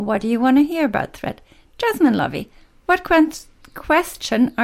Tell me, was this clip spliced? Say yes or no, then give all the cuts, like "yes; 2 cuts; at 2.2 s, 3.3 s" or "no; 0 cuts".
no; 0 cuts